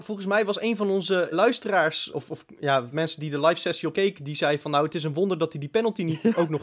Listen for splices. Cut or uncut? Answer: cut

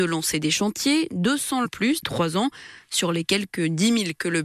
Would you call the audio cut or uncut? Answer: cut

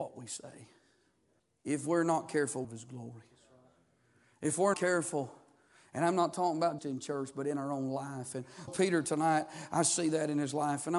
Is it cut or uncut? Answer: cut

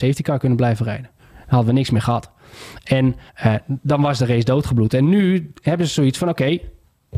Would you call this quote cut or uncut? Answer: cut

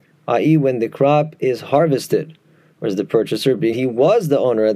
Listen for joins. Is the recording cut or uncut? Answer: cut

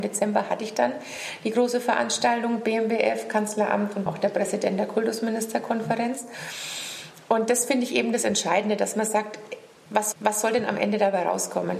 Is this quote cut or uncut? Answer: cut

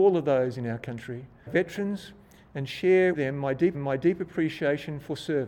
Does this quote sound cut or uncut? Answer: cut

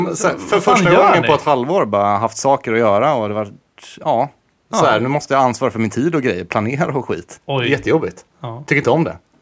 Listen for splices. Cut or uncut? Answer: uncut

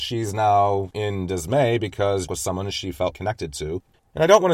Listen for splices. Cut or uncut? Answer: cut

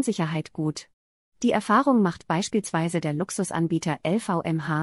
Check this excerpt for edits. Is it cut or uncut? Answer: uncut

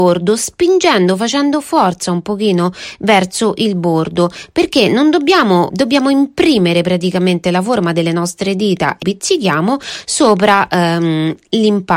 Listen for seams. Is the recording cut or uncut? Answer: cut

